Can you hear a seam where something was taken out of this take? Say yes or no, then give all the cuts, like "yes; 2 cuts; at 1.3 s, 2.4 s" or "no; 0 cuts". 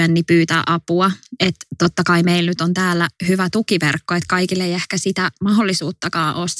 no; 0 cuts